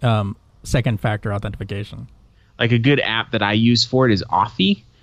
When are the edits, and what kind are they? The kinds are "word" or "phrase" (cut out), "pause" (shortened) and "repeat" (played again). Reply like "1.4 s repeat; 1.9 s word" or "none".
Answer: none